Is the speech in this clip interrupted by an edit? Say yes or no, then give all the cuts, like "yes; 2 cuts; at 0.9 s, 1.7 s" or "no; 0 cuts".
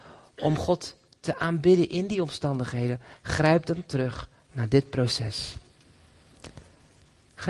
no; 0 cuts